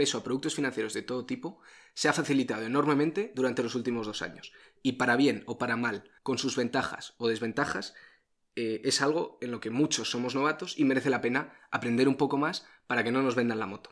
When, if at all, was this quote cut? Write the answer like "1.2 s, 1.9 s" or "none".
6.2 s

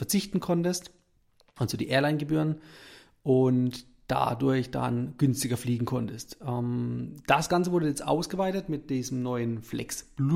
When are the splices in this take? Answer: none

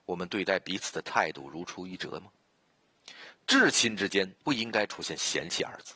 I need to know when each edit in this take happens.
4.4 s

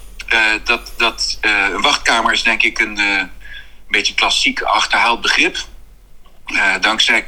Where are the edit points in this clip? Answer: none

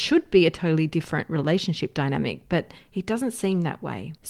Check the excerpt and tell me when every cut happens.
none

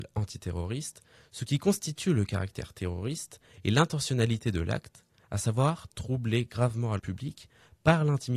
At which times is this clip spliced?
7.0 s

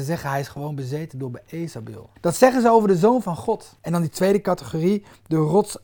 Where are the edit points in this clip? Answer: 2.2 s, 3.8 s

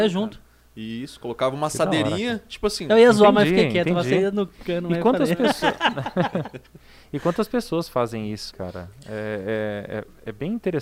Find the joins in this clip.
8.5 s

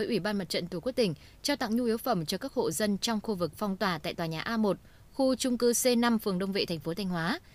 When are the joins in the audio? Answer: none

